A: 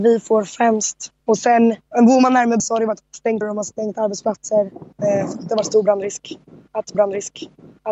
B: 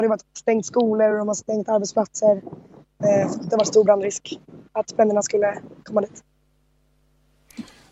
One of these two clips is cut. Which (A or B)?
A